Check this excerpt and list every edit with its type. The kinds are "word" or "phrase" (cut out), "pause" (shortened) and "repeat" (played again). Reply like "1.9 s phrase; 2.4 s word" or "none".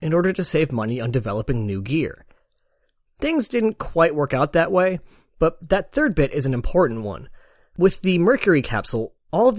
none

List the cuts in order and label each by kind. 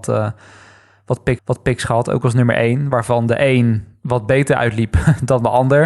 1.4 s repeat

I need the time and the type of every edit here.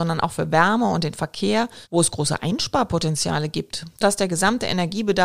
1.8 s pause; 4.0 s phrase

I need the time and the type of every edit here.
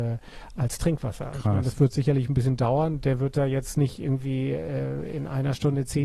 none

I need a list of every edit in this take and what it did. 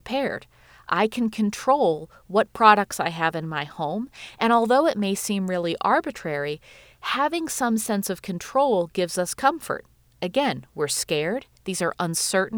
none

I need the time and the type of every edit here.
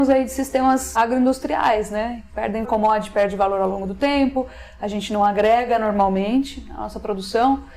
0.9 s word; 2.6 s word

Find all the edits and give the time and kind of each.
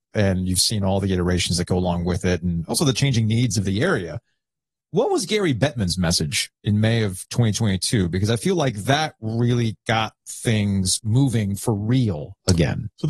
none

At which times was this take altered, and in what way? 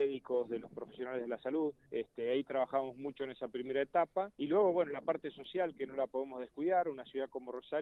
1.8 s pause; 4.3 s pause

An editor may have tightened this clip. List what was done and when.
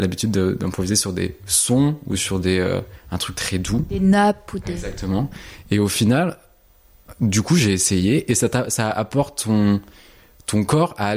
none

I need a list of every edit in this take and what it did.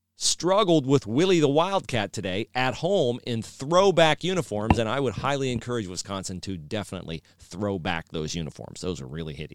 none

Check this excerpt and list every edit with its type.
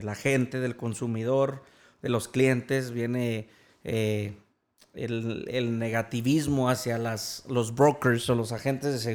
none

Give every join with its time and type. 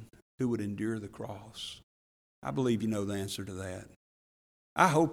none

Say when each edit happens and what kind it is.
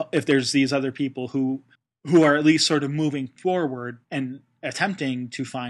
1.7 s pause; 4.0 s pause

